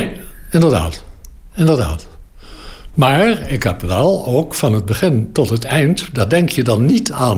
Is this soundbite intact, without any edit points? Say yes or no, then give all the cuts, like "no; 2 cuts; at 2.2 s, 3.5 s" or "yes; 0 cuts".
yes; 0 cuts